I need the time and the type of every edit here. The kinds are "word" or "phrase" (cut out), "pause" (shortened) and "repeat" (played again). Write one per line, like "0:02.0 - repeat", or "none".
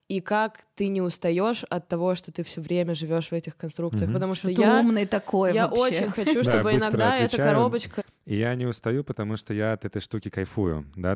none